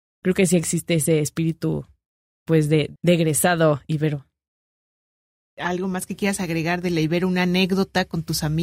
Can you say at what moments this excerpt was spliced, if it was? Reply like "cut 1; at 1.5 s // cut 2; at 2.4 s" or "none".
none

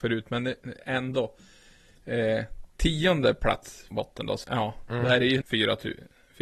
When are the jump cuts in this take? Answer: cut 1; at 2.7 s // cut 2; at 3.9 s // cut 3; at 4.4 s // cut 4; at 5.4 s

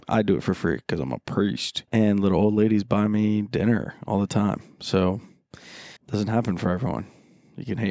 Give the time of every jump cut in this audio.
cut 1; at 1.9 s // cut 2; at 6.0 s

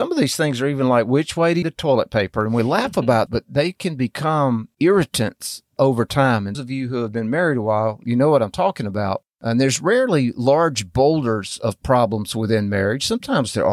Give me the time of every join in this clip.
cut 1; at 1.6 s // cut 2; at 3.3 s // cut 3; at 5.8 s // cut 4; at 6.5 s // cut 5; at 9.3 s

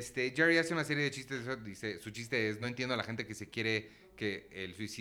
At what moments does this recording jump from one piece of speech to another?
none

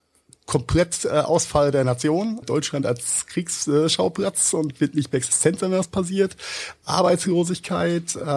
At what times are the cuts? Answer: cut 1; at 2.4 s

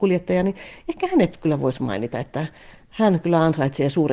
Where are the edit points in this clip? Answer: none

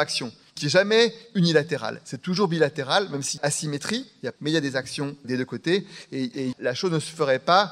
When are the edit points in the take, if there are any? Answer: cut 1; at 3.4 s // cut 2; at 4.4 s // cut 3; at 5.2 s // cut 4; at 6.5 s

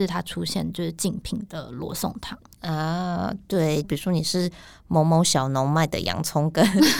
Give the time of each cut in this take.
cut 1; at 3.8 s

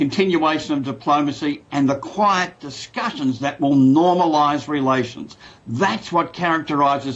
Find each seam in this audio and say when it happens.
none

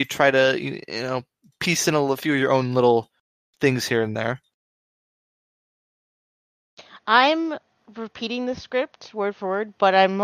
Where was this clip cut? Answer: none

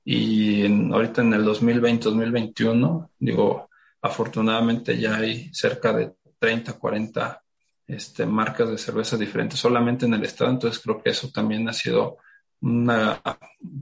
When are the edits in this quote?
none

